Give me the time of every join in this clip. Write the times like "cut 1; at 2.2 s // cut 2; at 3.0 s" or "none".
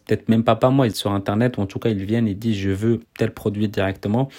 cut 1; at 0.9 s // cut 2; at 3.0 s